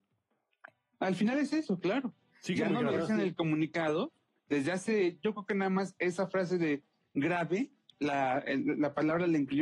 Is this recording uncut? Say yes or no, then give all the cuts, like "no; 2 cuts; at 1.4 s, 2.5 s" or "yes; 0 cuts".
yes; 0 cuts